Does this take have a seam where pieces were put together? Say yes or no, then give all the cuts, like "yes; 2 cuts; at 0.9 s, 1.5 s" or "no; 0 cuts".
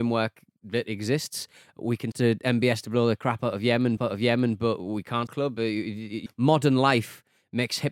yes; 4 cuts; at 2.1 s, 4.0 s, 5.3 s, 6.3 s